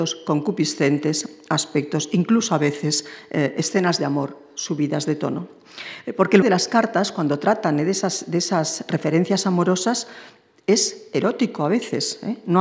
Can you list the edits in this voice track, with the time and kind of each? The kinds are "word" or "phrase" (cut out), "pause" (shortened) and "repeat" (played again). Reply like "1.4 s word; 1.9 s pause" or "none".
6.4 s word

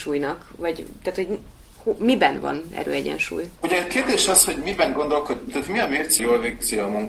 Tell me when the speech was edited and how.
6.2 s phrase

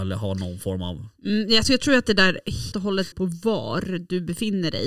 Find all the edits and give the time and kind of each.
1.6 s word; 2.7 s word; 3.1 s word

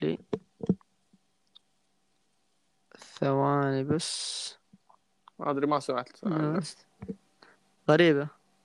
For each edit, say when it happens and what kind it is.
none

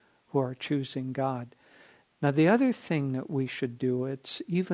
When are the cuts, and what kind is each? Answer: none

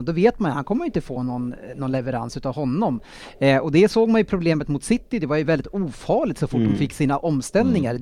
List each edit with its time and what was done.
none

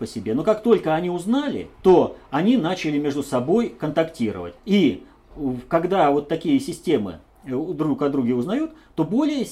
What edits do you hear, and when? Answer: 1.7 s pause; 4.6 s pause

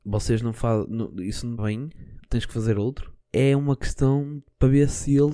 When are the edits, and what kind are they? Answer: 1.6 s word; 2.2 s pause; 3.2 s pause

